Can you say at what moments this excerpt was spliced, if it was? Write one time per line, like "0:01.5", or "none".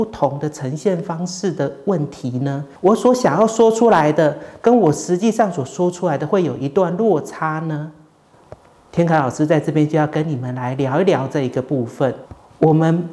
0:02.8